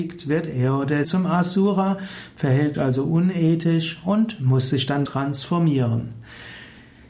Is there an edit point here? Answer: yes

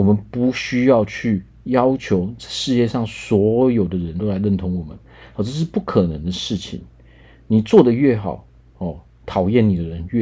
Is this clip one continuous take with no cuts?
yes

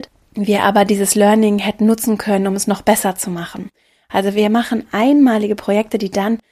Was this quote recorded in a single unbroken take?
yes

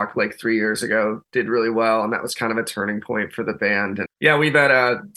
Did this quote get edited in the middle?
yes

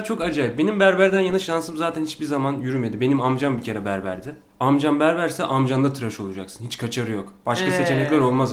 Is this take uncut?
yes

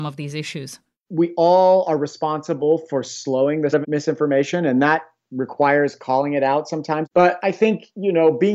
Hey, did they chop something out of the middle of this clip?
yes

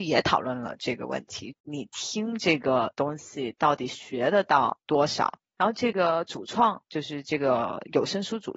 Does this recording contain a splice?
yes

